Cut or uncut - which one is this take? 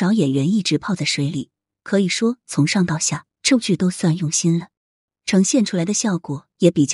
cut